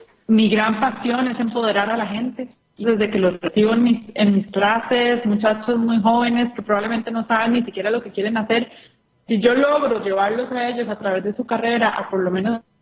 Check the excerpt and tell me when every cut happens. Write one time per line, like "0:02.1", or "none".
0:02.8